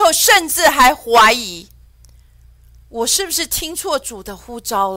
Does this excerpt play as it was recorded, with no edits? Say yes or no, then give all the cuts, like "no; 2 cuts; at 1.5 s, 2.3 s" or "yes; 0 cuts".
yes; 0 cuts